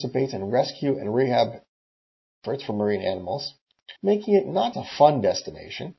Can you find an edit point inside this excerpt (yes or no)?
yes